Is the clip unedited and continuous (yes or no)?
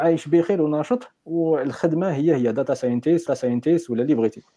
no